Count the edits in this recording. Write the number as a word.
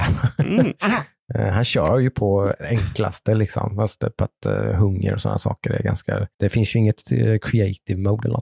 one